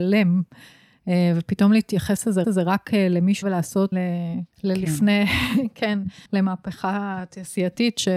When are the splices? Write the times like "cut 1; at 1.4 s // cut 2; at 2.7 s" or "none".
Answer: cut 1; at 2.4 s // cut 2; at 3.4 s // cut 3; at 3.9 s // cut 4; at 4.5 s // cut 5; at 6.3 s

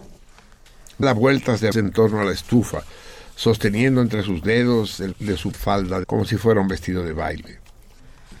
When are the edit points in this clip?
cut 1; at 1.0 s // cut 2; at 1.7 s // cut 3; at 5.1 s // cut 4; at 5.5 s // cut 5; at 6.0 s

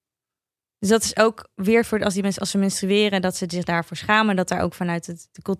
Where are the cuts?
none

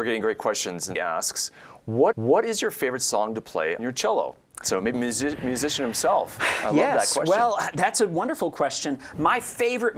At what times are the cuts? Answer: cut 1; at 1.0 s // cut 2; at 2.1 s // cut 3; at 3.8 s // cut 4; at 4.9 s

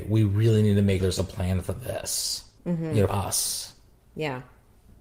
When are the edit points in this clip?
cut 1; at 1.0 s // cut 2; at 2.6 s // cut 3; at 3.1 s

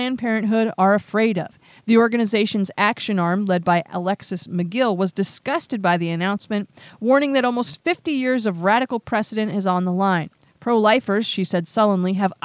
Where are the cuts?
none

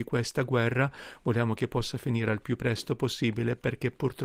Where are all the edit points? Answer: none

